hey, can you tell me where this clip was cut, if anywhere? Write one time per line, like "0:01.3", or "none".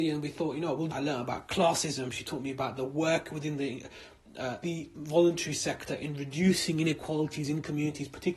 0:00.9
0:04.6
0:04.9